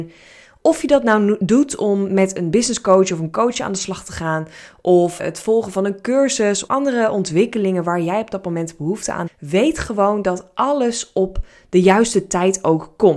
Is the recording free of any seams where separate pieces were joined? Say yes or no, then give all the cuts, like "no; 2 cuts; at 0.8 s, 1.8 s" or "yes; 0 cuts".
no; 3 cuts; at 5.2 s, 6.7 s, 9.3 s